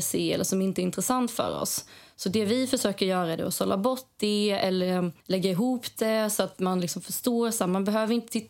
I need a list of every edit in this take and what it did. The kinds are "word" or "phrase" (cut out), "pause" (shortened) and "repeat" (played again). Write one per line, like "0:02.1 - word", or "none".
0:05.2 - pause